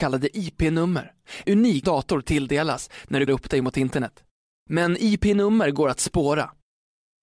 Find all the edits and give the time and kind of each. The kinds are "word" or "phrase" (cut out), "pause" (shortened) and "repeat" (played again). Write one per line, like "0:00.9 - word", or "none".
0:01.4 - word
0:01.8 - phrase
0:03.3 - word
0:04.4 - pause